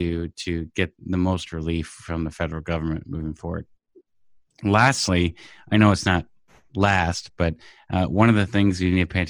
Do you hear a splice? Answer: yes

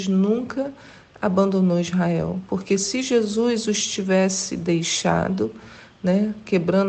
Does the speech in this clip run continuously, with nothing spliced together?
yes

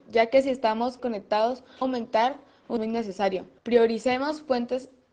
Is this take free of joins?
no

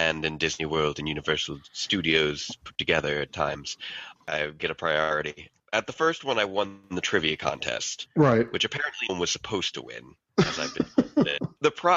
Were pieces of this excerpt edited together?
yes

